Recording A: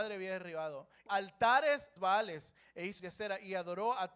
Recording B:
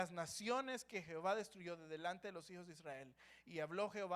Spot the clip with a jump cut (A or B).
A